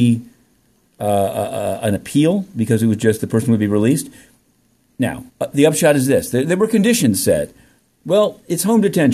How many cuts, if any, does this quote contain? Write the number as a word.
one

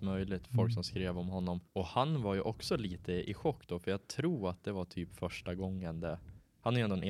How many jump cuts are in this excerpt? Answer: one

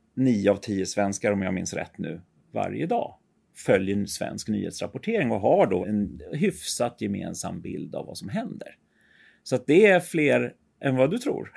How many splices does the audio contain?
one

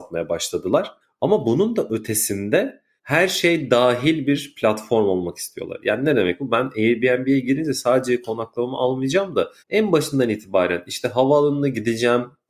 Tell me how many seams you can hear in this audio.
three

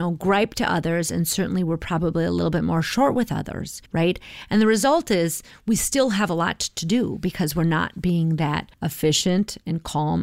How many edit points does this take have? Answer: one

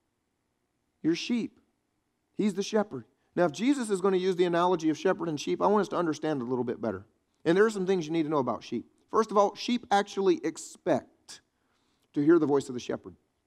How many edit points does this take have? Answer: one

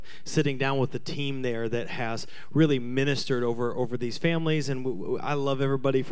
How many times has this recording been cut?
zero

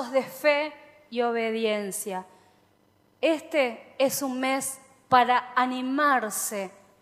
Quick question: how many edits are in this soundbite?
zero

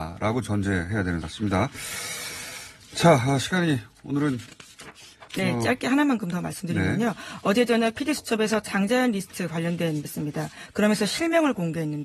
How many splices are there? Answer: three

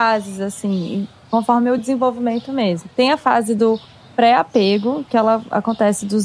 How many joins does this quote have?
zero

